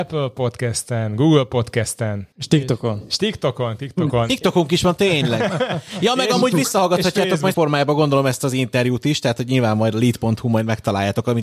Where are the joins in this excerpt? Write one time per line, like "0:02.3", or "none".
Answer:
0:02.3
0:07.5